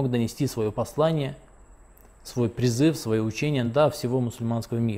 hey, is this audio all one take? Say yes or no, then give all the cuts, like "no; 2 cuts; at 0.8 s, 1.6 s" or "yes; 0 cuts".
yes; 0 cuts